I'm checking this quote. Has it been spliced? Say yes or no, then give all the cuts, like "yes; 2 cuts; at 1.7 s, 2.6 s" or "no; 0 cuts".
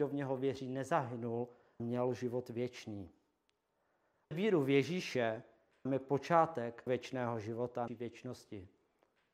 yes; 5 cuts; at 1.8 s, 4.3 s, 5.9 s, 6.9 s, 7.9 s